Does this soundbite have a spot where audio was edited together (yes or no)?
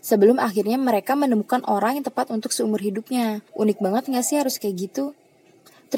yes